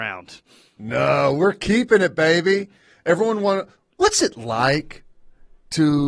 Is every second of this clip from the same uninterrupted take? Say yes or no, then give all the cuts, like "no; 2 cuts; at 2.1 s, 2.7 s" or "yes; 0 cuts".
yes; 0 cuts